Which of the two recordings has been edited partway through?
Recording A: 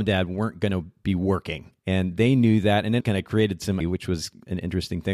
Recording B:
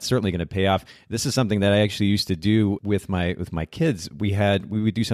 A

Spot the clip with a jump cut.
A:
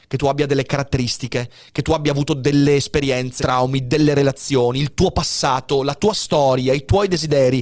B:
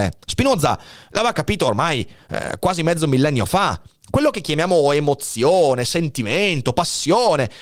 A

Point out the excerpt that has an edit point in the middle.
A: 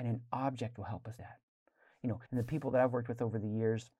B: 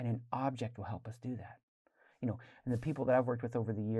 A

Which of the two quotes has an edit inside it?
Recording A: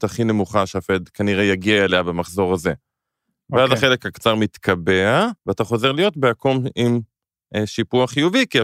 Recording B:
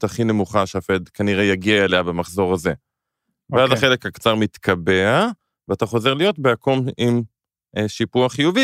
A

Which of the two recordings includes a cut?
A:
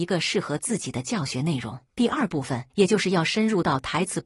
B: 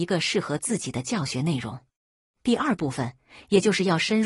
A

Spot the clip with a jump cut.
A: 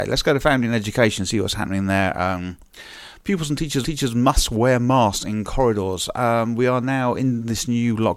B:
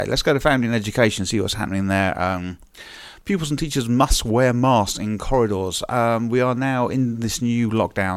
A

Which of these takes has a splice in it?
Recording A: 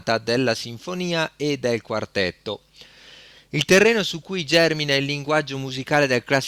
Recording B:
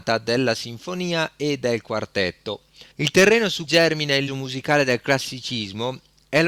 B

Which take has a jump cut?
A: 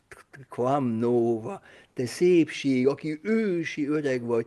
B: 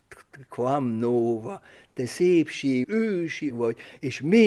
B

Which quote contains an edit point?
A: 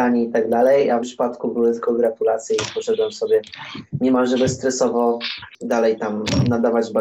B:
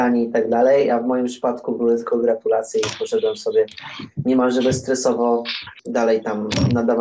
A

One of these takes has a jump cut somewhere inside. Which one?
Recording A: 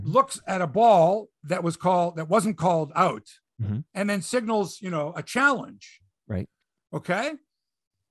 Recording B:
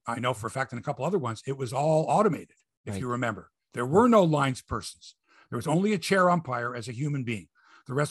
A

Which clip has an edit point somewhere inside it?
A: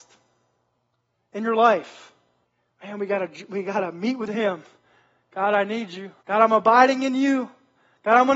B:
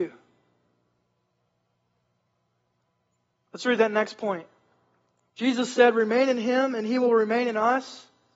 A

